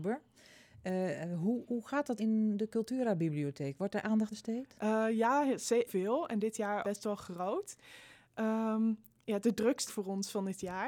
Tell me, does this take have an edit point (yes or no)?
yes